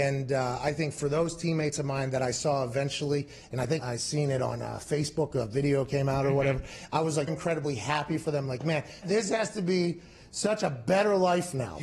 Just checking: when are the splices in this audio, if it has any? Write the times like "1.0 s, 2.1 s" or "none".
3.8 s, 7.3 s, 9.0 s

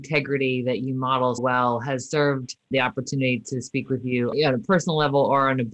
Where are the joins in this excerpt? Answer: 1.4 s, 2.7 s, 4.3 s

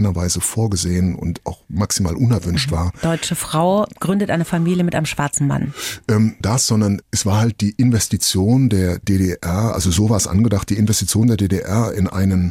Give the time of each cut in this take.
6.4 s

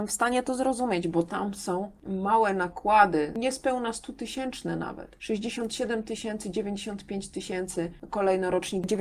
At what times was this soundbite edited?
2.0 s

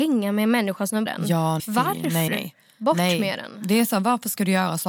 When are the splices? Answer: 1.1 s, 1.6 s, 2.3 s

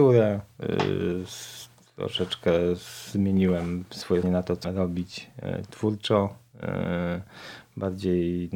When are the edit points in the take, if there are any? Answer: 4.2 s, 4.6 s

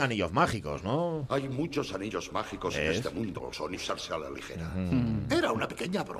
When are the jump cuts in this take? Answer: 3.4 s, 3.7 s

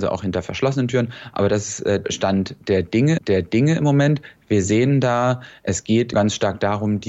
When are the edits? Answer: 2.0 s, 3.2 s, 6.1 s

